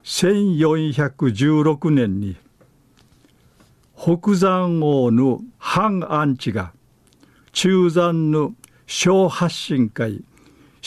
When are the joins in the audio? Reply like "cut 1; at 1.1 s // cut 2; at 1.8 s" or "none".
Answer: cut 1; at 5.5 s